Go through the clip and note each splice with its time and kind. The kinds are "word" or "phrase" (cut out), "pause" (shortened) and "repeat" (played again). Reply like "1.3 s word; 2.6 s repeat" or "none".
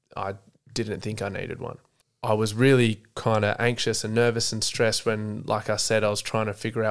none